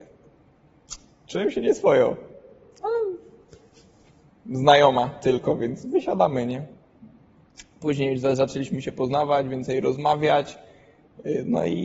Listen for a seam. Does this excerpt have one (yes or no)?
no